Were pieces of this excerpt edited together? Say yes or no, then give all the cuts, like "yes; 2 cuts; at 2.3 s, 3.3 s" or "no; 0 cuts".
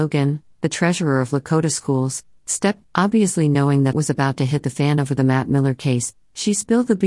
yes; 2 cuts; at 2.8 s, 3.9 s